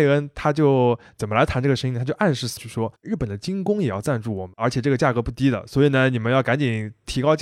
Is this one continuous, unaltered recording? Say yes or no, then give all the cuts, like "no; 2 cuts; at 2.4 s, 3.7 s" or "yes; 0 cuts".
no; 1 cut; at 2.6 s